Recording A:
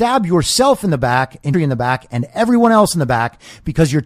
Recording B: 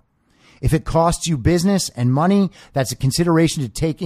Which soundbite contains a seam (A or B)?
A